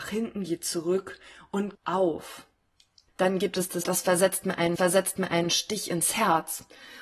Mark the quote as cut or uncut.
cut